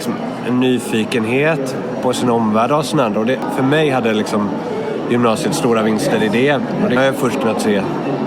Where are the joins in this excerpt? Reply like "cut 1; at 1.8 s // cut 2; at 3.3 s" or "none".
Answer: cut 1; at 1.9 s // cut 2; at 7.0 s